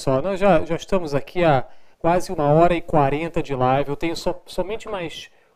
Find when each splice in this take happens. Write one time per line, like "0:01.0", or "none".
0:01.9